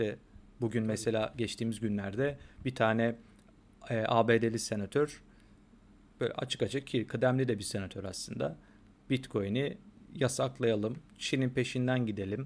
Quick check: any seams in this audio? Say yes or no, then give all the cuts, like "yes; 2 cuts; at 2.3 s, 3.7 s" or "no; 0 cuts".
no; 0 cuts